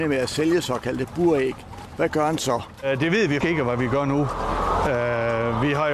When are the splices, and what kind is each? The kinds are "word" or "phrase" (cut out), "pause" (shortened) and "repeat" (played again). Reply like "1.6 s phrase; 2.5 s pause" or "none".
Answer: 3.4 s word